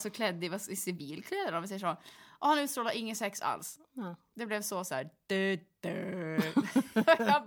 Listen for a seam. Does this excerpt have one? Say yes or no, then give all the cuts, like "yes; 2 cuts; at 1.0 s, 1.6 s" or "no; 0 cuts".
no; 0 cuts